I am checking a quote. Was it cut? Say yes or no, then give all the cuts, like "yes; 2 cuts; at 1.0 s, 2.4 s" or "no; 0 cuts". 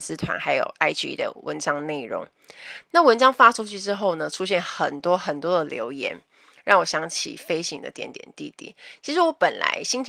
no; 0 cuts